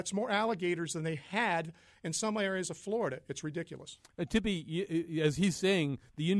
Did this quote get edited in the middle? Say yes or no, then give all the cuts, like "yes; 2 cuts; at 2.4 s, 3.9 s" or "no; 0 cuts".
no; 0 cuts